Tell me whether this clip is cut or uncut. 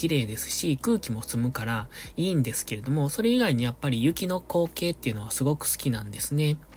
uncut